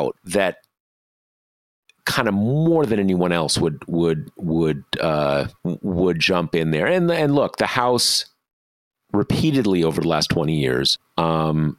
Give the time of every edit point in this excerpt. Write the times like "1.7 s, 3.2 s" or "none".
none